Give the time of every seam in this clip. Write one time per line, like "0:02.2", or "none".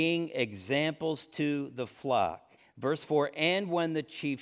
0:02.6